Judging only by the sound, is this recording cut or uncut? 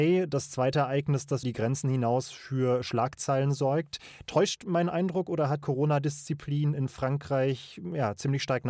cut